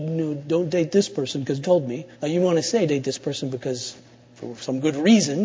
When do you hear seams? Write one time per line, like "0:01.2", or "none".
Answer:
0:01.6
0:02.1
0:02.9